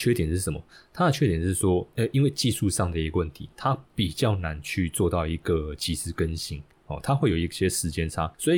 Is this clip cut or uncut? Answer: cut